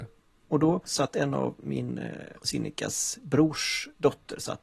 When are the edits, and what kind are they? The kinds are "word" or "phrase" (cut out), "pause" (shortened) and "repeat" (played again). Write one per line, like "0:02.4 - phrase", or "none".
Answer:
0:02.4 - pause